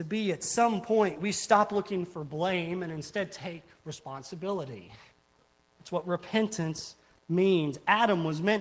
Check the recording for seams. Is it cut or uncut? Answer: uncut